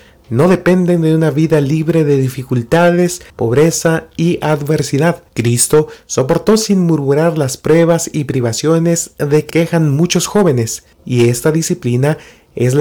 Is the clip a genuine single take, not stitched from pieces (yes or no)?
no